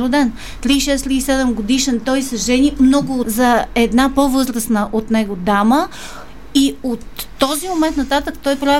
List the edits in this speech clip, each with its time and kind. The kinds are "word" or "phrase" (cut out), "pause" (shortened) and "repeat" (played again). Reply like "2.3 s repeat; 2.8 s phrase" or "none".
3.2 s word